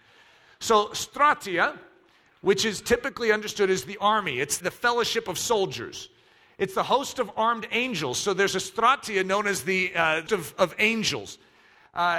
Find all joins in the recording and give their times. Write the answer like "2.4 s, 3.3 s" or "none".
4.6 s, 10.3 s

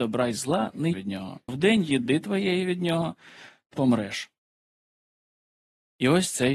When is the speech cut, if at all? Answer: 0.9 s, 1.5 s, 3.7 s

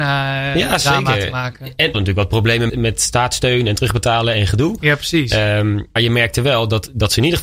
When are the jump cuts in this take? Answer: 1.9 s, 2.7 s, 6.0 s

